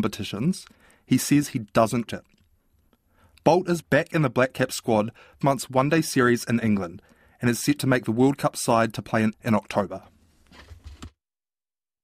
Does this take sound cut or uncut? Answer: cut